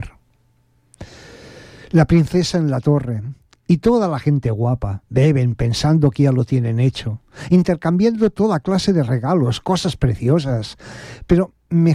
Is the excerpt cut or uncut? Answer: uncut